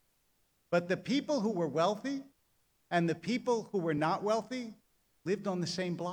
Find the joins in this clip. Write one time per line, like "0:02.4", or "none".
none